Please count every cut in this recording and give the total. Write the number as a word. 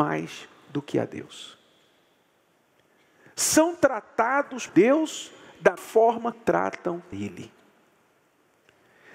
four